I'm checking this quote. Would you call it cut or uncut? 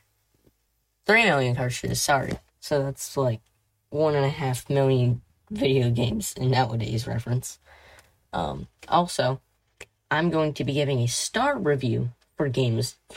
cut